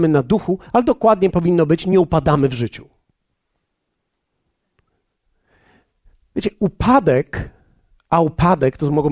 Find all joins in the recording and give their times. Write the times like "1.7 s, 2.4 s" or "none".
none